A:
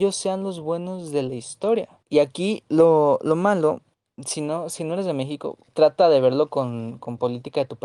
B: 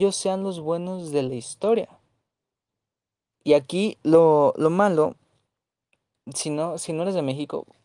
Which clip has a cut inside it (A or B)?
A